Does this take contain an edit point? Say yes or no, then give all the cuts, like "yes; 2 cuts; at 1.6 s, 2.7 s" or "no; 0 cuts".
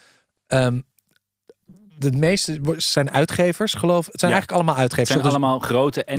no; 0 cuts